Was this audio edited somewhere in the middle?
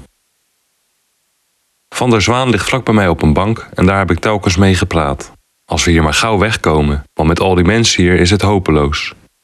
yes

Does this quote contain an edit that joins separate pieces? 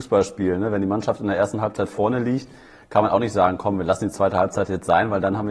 no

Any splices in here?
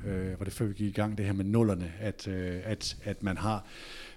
no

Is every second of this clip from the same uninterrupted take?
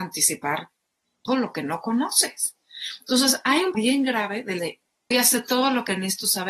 no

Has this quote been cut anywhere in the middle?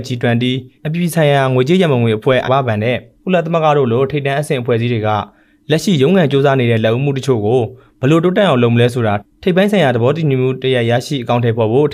yes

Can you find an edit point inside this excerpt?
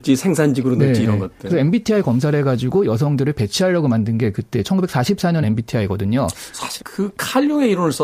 yes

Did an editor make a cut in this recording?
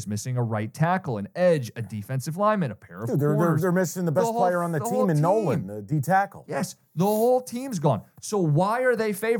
no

